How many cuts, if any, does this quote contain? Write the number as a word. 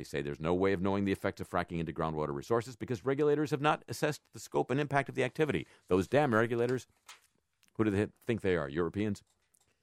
zero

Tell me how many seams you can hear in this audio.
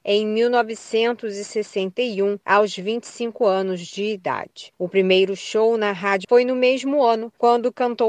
one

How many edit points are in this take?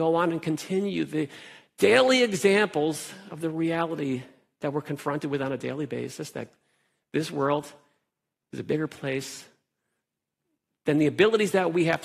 zero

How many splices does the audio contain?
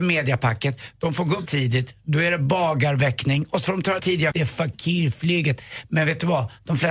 three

